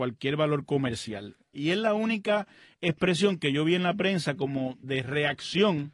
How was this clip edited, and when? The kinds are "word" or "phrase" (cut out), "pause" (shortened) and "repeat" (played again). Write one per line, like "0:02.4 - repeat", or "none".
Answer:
0:04.8 - word